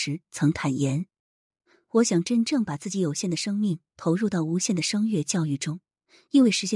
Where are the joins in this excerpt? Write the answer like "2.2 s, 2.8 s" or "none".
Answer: none